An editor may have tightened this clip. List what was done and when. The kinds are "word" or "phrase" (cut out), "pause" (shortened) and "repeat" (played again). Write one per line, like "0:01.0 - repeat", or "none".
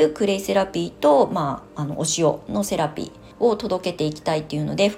0:03.3 - pause